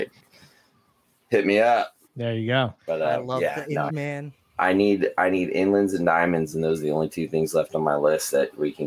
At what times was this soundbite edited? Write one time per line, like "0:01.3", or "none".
0:02.0
0:02.8
0:03.9

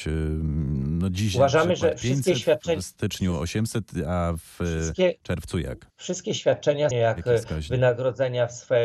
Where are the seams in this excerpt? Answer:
0:05.9
0:06.9

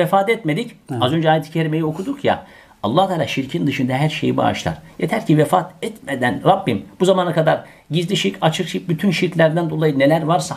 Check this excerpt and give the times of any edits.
none

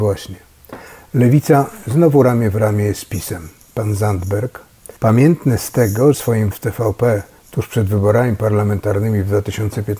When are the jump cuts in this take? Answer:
0:05.0
0:06.1
0:06.5

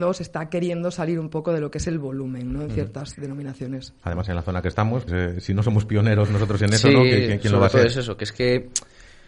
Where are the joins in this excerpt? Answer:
0:04.0
0:05.1

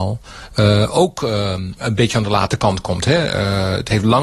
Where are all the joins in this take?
none

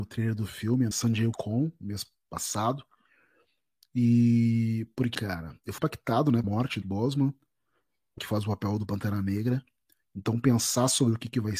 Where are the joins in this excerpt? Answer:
0:00.9
0:01.3
0:05.1
0:05.8
0:06.4
0:06.8
0:08.2

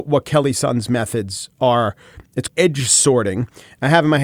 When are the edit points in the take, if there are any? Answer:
0:02.5

